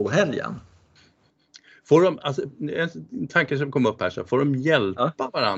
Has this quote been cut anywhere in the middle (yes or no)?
no